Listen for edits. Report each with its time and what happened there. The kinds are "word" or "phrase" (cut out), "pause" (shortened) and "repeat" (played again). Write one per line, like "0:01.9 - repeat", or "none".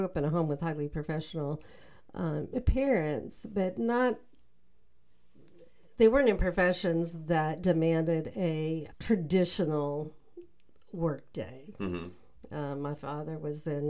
0:08.9 - word